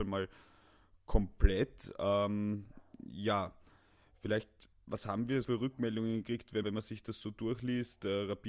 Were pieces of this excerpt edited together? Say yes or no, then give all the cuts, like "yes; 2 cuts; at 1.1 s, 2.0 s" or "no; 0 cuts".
yes; 3 cuts; at 4.8 s, 5.4 s, 6.6 s